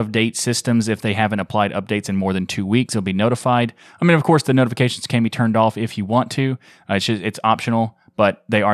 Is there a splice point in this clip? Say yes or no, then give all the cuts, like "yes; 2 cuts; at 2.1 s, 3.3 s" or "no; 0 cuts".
no; 0 cuts